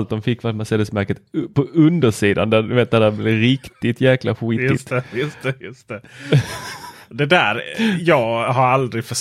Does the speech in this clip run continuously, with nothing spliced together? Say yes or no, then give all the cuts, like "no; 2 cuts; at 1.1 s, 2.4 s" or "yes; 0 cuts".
yes; 0 cuts